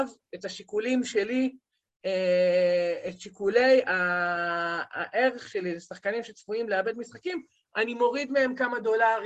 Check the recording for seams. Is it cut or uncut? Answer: uncut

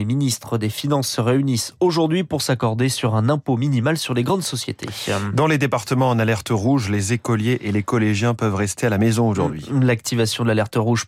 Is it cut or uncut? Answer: uncut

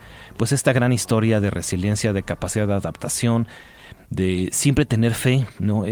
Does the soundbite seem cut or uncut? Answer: uncut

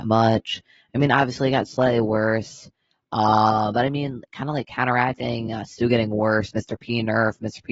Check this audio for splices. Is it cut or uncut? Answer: uncut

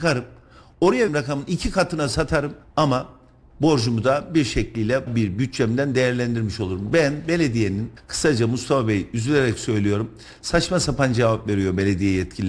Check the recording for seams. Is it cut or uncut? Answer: cut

